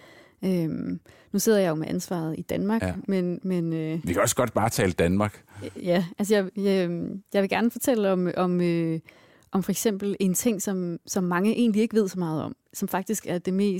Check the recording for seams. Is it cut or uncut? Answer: uncut